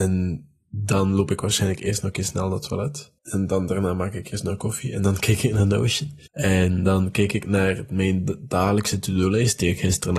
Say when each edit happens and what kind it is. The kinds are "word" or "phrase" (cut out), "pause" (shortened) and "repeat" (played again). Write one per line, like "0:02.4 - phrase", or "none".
0:03.2 - pause
0:06.3 - pause